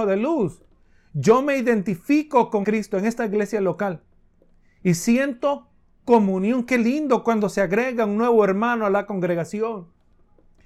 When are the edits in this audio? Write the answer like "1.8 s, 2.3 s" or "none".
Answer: 2.6 s